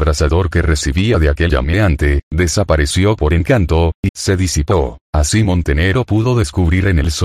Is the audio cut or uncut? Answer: cut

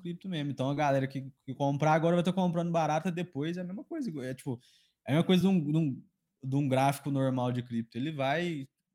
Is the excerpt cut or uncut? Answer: uncut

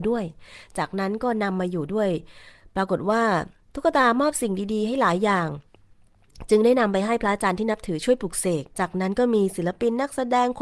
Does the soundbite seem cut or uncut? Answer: cut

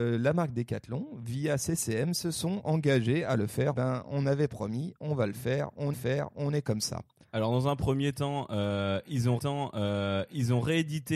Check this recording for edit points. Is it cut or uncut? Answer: cut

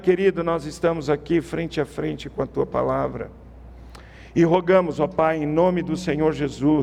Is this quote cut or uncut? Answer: uncut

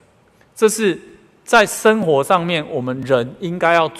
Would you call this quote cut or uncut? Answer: uncut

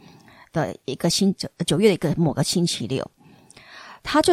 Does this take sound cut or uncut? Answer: uncut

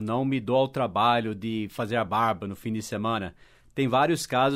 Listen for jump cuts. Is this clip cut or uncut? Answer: uncut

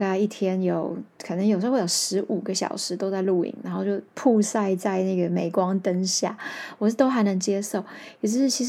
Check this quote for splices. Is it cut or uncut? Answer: cut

